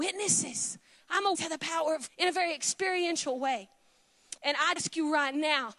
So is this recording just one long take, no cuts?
no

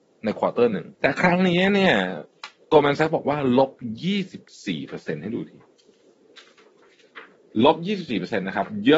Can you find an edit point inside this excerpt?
yes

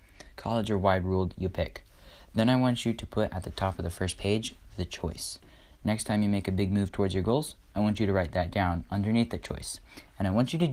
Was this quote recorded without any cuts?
yes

